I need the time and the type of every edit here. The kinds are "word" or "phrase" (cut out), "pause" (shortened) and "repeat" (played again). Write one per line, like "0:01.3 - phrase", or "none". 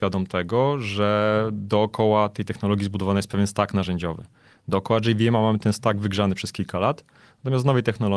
none